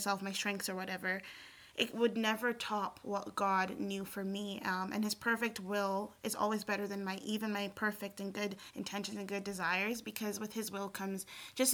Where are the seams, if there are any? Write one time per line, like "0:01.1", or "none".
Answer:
none